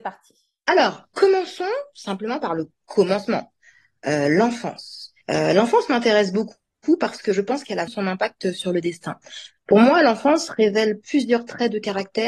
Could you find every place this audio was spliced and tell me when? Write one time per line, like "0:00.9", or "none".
0:05.2
0:07.9